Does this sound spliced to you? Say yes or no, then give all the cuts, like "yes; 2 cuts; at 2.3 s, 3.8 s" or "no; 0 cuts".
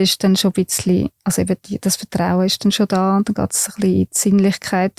no; 0 cuts